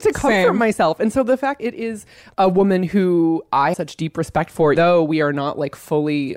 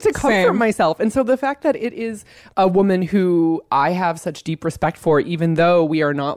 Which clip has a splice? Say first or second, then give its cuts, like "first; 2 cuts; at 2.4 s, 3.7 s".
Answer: first; 3 cuts; at 1.6 s, 3.7 s, 4.8 s